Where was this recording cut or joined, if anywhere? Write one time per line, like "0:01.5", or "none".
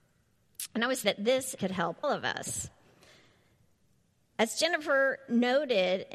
0:01.0
0:01.6
0:02.0